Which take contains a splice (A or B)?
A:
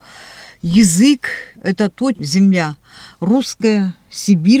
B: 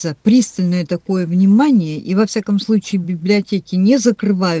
A